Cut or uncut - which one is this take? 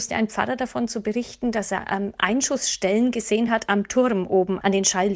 uncut